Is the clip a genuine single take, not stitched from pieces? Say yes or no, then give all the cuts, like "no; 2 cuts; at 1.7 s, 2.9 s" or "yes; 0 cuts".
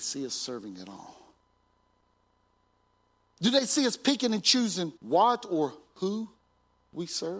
no; 1 cut; at 5.0 s